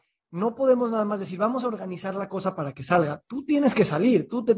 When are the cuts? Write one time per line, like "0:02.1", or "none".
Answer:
none